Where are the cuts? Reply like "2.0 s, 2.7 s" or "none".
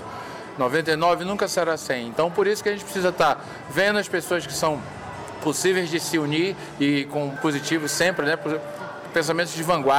7.4 s

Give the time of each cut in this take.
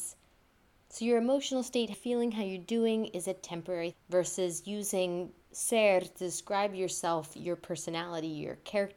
1.9 s, 3.9 s

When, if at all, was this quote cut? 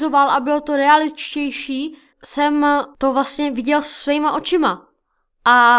2.1 s

